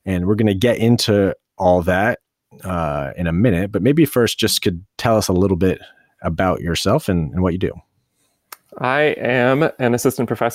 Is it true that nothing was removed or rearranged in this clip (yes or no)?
yes